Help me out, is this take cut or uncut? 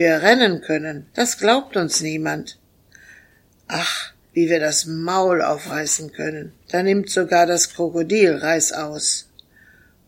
cut